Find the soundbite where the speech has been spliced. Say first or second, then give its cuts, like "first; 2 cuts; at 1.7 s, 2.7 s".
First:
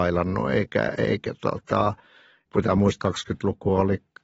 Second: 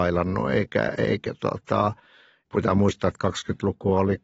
first; 1 cut; at 3.0 s